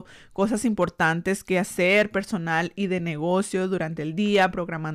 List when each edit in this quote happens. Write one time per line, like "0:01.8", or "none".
none